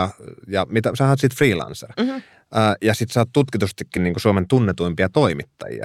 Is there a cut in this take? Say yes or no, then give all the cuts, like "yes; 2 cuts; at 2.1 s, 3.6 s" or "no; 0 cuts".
no; 0 cuts